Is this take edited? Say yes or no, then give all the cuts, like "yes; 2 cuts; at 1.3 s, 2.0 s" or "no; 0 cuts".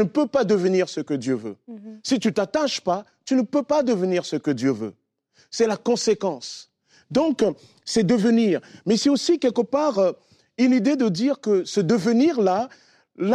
no; 0 cuts